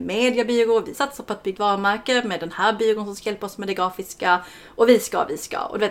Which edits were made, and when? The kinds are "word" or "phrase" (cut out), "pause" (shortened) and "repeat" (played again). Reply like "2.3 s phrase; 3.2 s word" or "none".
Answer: 0.9 s word; 1.6 s word